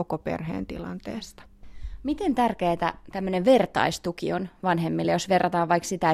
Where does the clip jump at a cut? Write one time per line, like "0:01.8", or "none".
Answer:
none